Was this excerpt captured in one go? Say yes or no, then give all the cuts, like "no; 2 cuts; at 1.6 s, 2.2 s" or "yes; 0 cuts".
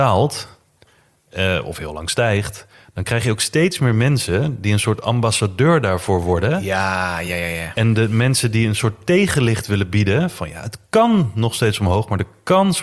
yes; 0 cuts